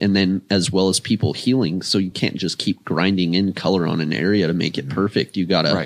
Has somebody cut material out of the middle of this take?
no; 0 cuts

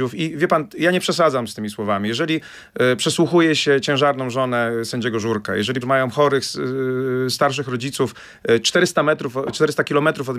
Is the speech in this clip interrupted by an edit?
yes; 1 cut; at 5.8 s

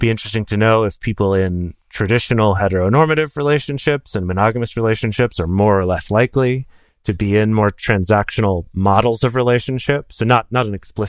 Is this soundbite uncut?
yes; 0 cuts

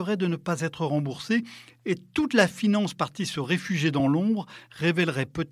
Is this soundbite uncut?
yes; 0 cuts

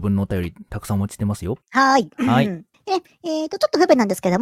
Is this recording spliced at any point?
yes; 2 cuts; at 1.6 s, 2.7 s

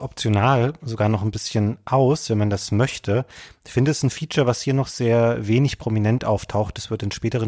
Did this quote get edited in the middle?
no; 0 cuts

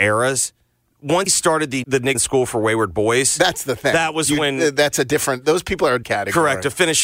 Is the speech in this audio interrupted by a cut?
yes; 4 cuts; at 1.3 s, 1.8 s, 2.1 s, 6.0 s

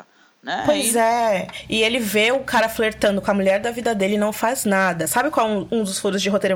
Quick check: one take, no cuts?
yes; 0 cuts

